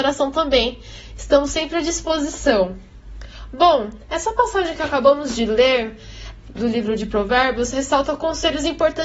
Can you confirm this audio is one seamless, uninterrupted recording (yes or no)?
yes